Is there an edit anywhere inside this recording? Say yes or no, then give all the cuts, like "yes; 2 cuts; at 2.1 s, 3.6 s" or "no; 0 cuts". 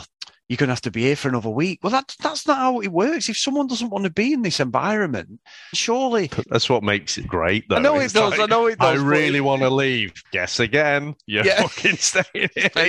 yes; 4 cuts; at 5.7 s, 6.4 s, 7.2 s, 10.2 s